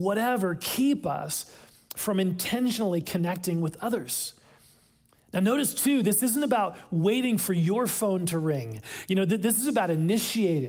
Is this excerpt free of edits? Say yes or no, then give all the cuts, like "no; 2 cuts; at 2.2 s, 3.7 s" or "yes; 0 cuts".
yes; 0 cuts